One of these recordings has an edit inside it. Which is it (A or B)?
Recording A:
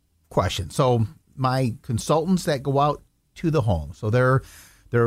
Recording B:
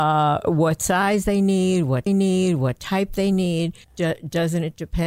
B